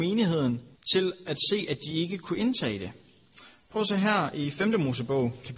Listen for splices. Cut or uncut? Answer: uncut